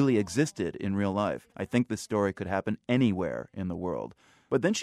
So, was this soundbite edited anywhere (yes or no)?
yes